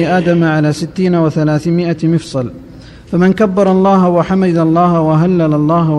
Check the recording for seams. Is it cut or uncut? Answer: uncut